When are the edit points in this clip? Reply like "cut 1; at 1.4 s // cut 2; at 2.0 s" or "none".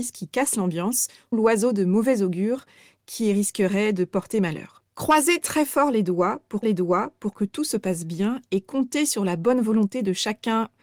cut 1; at 1.3 s // cut 2; at 4.9 s // cut 3; at 6.6 s